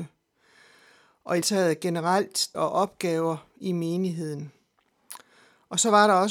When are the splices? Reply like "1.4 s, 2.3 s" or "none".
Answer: 1.4 s, 2.5 s

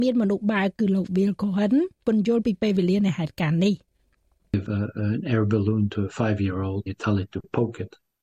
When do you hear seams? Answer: 4.7 s, 6.9 s

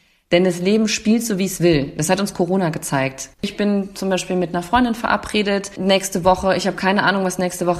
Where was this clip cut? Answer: 3.3 s

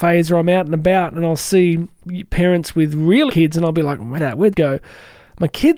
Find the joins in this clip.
3.3 s, 4.2 s, 4.5 s

